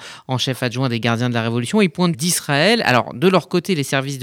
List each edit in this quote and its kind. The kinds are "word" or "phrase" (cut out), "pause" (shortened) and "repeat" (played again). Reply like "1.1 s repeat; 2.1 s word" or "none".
2.1 s phrase